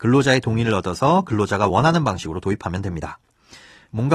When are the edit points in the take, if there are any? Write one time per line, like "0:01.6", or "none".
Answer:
none